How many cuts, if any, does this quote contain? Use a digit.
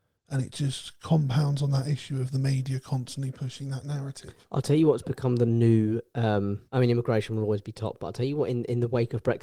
1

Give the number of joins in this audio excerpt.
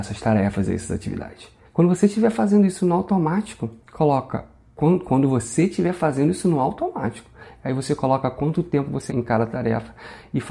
3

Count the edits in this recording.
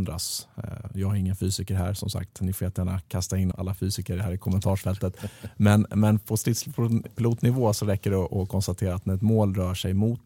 1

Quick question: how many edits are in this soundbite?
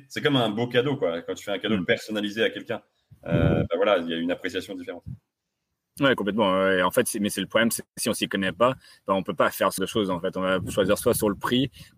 1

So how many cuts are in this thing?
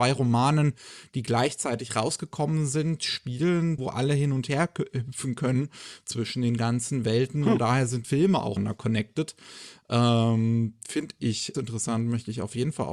4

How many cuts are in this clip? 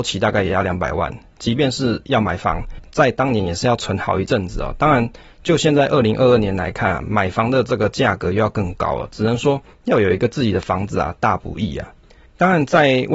0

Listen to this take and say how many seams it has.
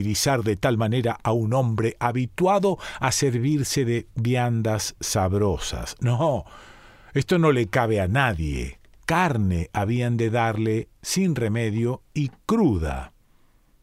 0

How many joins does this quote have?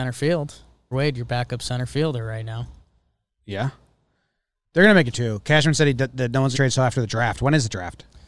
3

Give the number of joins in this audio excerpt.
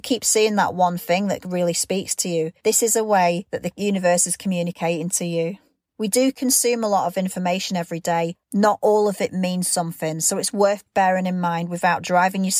1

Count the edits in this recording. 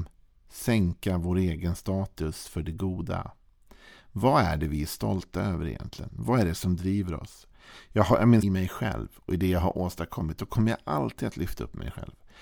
1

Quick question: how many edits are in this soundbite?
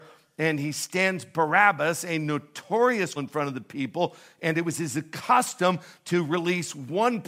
1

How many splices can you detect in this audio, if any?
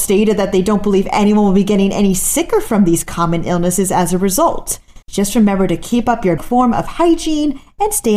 2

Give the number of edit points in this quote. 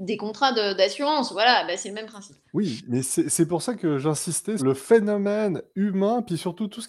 2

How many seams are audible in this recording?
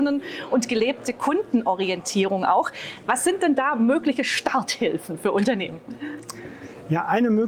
0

